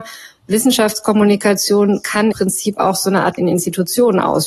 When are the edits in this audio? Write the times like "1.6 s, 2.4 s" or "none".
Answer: 2.3 s, 3.4 s